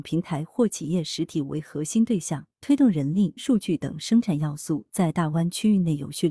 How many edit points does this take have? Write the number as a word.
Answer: one